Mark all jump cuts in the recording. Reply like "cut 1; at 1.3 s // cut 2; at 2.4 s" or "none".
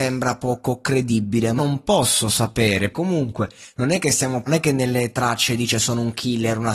cut 1; at 1.6 s // cut 2; at 2.9 s // cut 3; at 4.5 s